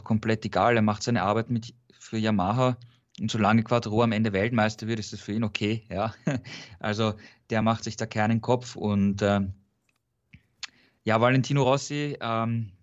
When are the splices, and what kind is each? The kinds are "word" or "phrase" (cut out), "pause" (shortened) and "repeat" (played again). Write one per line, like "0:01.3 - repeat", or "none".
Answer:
none

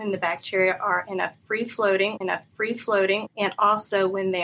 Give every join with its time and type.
0:02.2 - repeat

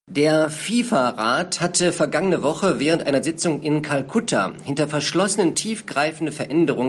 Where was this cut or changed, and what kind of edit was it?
0:05.5 - word

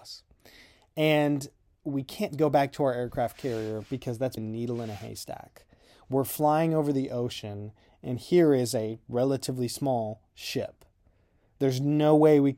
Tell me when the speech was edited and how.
0:04.4 - word

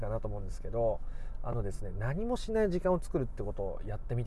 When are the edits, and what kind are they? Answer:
none

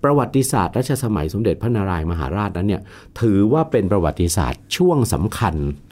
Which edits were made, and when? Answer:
none

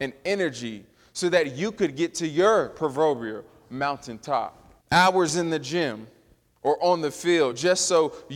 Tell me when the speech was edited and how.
0:04.8 - pause

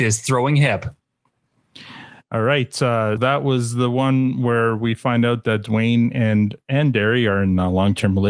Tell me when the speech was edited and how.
0:03.2 - word

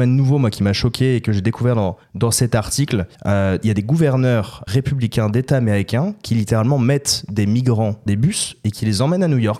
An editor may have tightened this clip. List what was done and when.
0:02.0 - pause
0:03.1 - pause
0:04.7 - word
0:08.1 - word

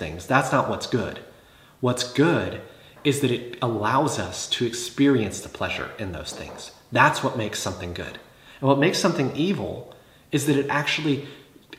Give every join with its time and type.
none

